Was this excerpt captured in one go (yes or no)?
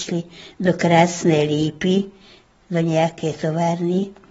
yes